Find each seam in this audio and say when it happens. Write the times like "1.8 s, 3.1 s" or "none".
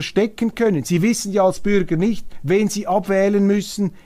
none